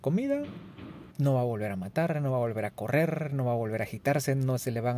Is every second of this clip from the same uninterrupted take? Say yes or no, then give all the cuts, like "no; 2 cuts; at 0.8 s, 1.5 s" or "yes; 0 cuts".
no; 1 cut; at 1.1 s